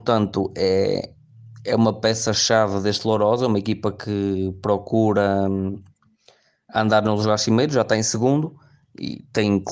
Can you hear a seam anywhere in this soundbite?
no; 0 cuts

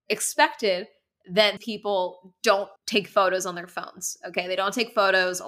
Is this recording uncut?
no; 2 cuts; at 1.6 s, 2.8 s

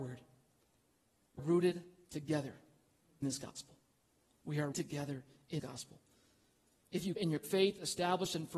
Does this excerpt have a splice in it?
yes; 5 cuts; at 1.4 s, 3.2 s, 4.7 s, 5.6 s, 7.2 s

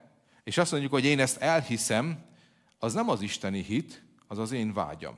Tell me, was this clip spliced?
no; 0 cuts

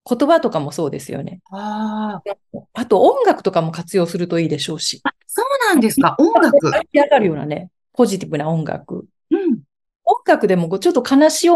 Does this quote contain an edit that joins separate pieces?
yes; 2 cuts; at 1.5 s, 5.2 s

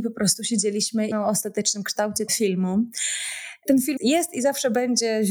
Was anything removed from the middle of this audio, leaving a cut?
yes; 3 cuts; at 1.1 s, 2.3 s, 4.0 s

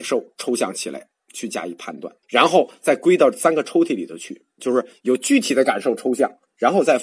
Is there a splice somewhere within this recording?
yes; 1 cut; at 2.2 s

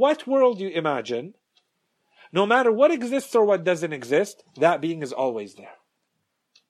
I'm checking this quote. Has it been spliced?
no; 0 cuts

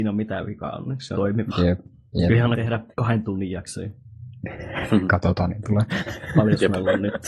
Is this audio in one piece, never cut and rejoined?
no; 4 cuts; at 1.1 s, 2.5 s, 2.9 s, 5.6 s

